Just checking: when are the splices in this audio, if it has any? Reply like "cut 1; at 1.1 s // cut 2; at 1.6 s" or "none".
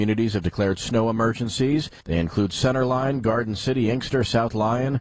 cut 1; at 2.0 s